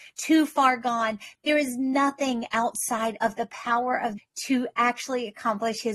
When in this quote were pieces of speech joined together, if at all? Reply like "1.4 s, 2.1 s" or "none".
4.2 s